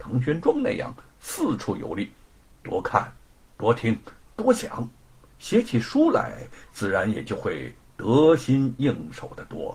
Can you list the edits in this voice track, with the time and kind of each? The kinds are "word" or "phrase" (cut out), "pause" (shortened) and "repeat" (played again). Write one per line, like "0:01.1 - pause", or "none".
none